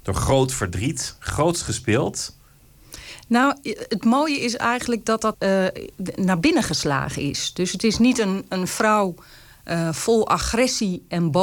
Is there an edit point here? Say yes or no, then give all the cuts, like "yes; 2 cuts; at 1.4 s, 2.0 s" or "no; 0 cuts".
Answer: yes; 1 cut; at 5.3 s